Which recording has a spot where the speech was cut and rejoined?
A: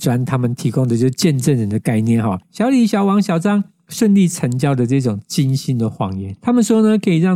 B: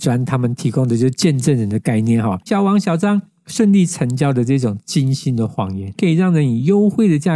B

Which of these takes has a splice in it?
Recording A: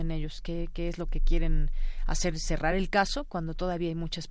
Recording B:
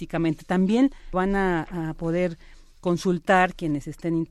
B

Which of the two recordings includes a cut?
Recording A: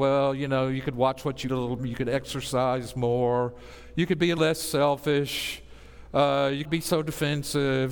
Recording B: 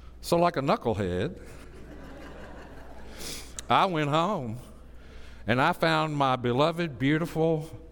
A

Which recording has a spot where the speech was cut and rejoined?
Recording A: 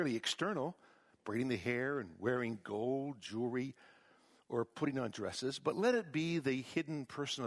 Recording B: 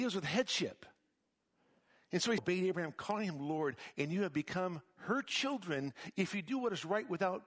B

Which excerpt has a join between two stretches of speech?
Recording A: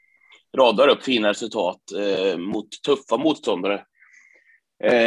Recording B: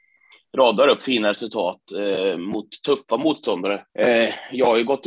B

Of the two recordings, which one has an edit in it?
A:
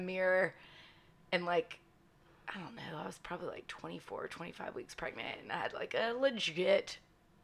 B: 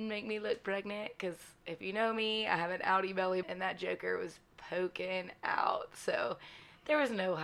B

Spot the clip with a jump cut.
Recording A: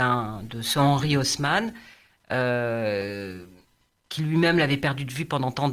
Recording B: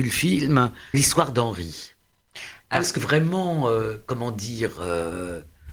B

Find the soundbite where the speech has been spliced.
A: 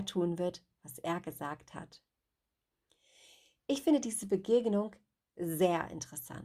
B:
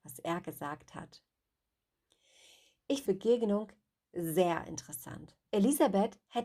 B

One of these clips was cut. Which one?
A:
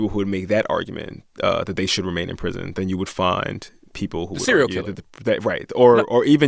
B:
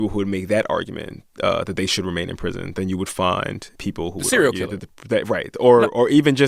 B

